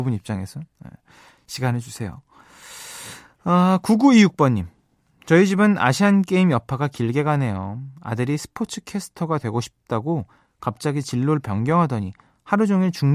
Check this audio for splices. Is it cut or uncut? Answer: uncut